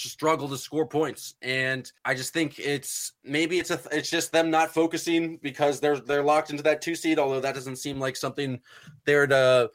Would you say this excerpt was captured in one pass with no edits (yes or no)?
no